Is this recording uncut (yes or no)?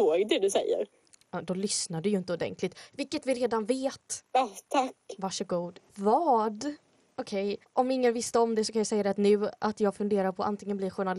yes